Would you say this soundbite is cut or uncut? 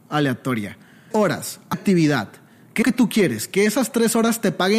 cut